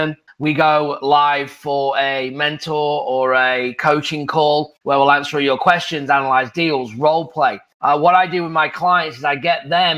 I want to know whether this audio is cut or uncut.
uncut